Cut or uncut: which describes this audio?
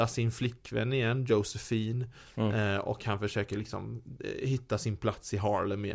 uncut